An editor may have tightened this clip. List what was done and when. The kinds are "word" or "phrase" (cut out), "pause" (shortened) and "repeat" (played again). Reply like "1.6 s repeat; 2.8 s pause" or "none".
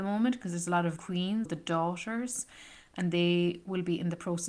1.0 s word; 1.5 s word